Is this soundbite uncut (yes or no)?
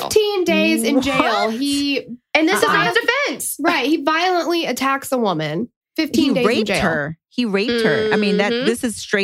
no